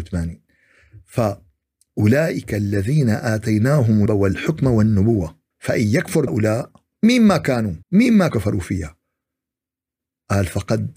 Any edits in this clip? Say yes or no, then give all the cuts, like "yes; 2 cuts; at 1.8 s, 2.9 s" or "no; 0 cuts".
yes; 7 cuts; at 1.0 s, 4.1 s, 5.5 s, 6.3 s, 6.9 s, 7.8 s, 8.3 s